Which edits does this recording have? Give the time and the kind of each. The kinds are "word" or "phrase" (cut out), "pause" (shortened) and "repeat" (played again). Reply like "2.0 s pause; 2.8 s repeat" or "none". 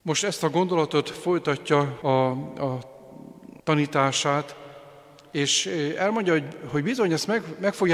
2.0 s phrase; 3.6 s pause